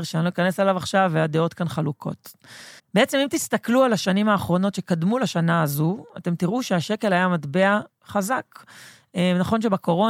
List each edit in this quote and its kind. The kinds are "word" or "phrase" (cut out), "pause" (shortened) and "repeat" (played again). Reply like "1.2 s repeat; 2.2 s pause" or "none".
2.8 s pause